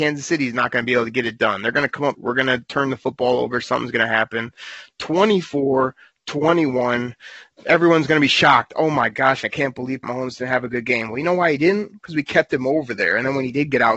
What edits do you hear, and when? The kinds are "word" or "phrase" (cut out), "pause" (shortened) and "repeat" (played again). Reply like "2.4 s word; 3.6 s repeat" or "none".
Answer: 2.1 s word; 10.0 s word